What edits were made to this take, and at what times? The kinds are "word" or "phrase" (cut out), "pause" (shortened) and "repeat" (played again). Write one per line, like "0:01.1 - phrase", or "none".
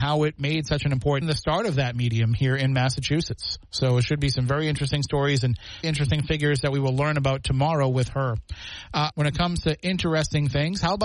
0:01.2 - phrase
0:05.8 - phrase
0:09.1 - word